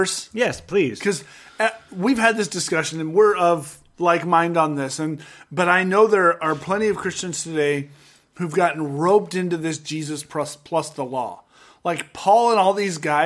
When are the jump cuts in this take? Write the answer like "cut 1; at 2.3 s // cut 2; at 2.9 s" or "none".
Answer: none